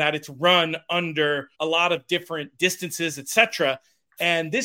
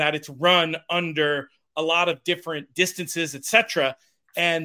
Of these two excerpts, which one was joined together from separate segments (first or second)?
first